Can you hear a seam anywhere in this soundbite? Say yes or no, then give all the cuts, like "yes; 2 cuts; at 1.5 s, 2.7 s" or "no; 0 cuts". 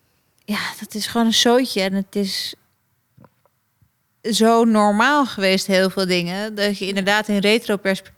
no; 0 cuts